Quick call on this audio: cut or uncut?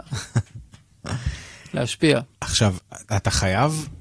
cut